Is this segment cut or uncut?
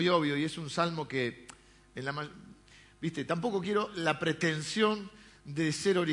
uncut